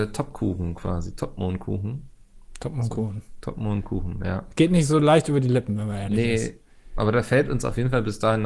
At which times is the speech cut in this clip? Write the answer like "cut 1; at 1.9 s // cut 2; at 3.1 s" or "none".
cut 1; at 7.0 s